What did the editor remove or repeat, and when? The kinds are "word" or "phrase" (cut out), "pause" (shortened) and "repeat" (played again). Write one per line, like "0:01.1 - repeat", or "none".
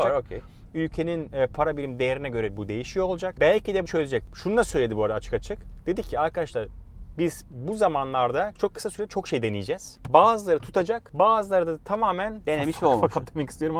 0:03.9 - word
0:08.6 - pause